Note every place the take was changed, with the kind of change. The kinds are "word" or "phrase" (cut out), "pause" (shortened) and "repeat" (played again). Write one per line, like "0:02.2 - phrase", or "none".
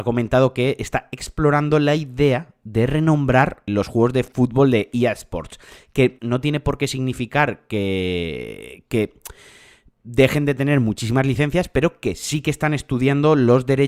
0:03.7 - word
0:06.2 - word